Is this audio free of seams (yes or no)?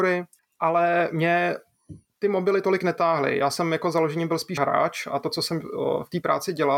no